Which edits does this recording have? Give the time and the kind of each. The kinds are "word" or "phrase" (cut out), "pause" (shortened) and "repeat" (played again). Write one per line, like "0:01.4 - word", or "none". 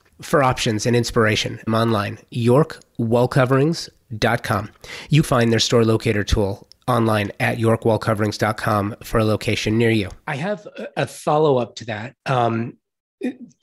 0:01.7 - word
0:05.2 - phrase
0:06.8 - pause
0:10.9 - word
0:12.2 - pause